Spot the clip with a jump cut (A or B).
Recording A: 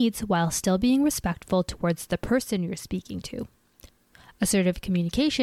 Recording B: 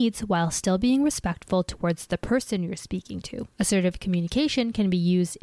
B